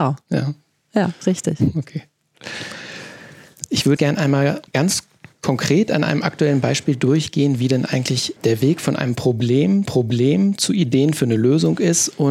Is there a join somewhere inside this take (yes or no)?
yes